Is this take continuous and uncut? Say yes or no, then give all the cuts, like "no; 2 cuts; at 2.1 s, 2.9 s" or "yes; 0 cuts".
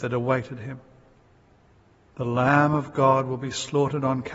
yes; 0 cuts